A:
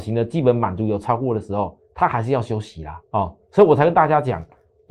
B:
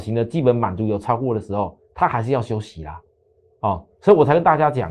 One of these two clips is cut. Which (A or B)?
A